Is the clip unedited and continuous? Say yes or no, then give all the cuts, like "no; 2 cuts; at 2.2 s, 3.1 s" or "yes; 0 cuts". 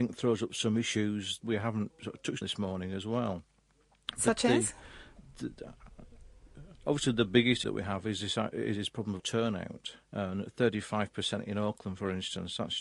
no; 6 cuts; at 1.4 s, 1.9 s, 2.4 s, 7.6 s, 9.2 s, 10.0 s